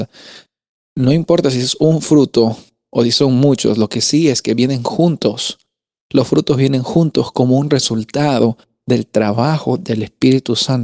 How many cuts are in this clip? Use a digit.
0